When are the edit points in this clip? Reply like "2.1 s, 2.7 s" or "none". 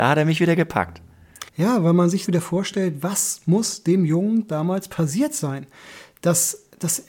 1.5 s, 2.3 s

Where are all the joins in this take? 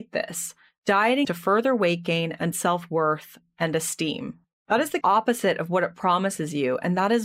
1.2 s, 2.5 s, 5.0 s

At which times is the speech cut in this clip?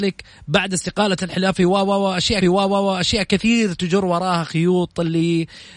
2.4 s

